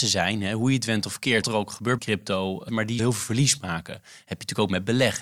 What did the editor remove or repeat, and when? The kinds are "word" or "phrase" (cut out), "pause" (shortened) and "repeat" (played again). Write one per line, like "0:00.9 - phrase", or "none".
0:01.4 - word
0:02.0 - word
0:02.7 - word
0:03.0 - word

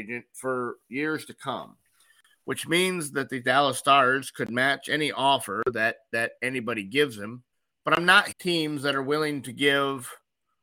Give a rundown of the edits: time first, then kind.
0:07.5 - pause
0:08.3 - word

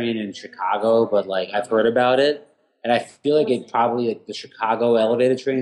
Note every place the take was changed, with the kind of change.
none

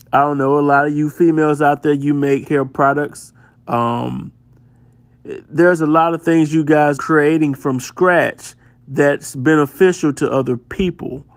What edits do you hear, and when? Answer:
0:02.4 - word
0:07.0 - word

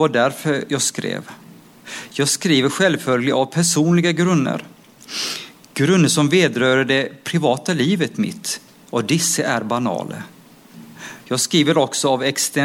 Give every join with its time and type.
0:08.7 - pause

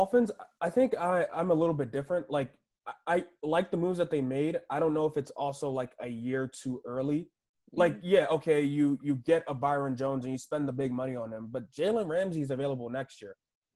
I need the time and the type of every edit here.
none

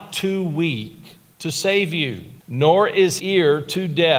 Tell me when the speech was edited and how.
0:02.4 - pause
0:03.2 - word

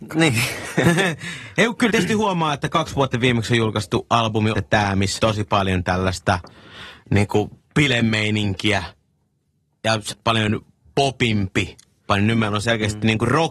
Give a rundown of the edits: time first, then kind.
0:01.9 - word
0:03.1 - word
0:04.5 - word
0:05.2 - word
0:10.1 - word
0:12.1 - word

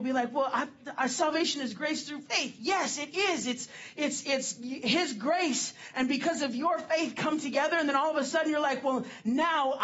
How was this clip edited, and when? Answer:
none

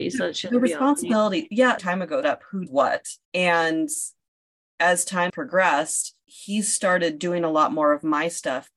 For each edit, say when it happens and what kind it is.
0:01.8 - phrase
0:02.2 - word
0:02.7 - word
0:03.2 - word
0:05.3 - word
0:06.2 - pause

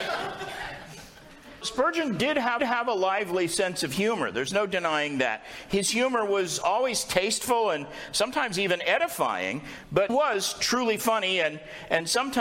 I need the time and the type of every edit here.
0:01.6 - word
0:02.6 - repeat
0:10.1 - word

